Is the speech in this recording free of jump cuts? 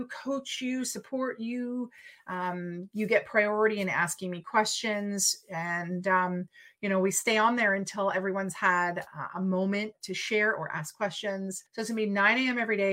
no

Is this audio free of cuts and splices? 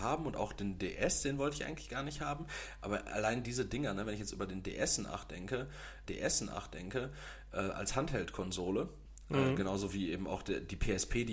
no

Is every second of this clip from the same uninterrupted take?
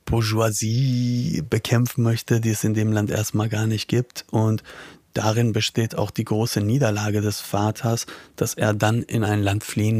yes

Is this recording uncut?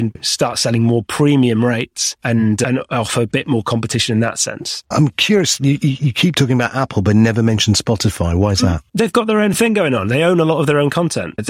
yes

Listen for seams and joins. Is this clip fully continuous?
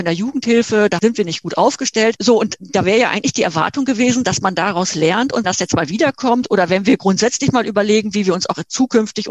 no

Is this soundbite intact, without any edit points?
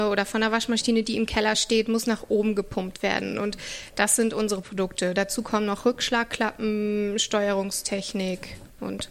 yes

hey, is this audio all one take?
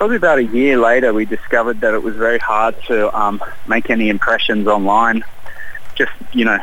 yes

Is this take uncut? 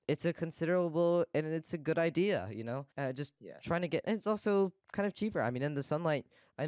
no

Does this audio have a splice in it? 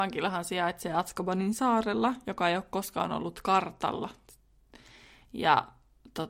no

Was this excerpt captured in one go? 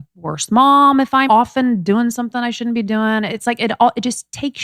no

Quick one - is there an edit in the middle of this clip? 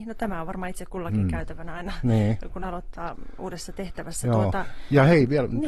no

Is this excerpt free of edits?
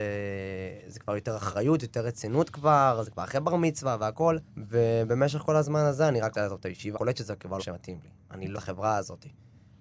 no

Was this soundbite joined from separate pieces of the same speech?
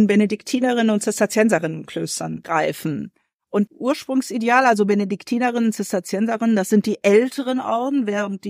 yes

